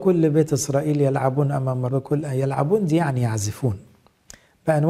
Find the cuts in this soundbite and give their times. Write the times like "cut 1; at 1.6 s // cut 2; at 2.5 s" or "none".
cut 1; at 1.9 s